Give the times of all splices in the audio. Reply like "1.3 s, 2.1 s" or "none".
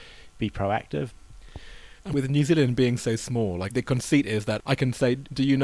2.0 s